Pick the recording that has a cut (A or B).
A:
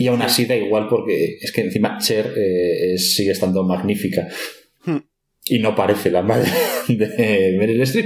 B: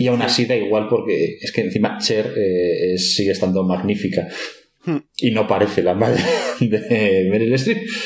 B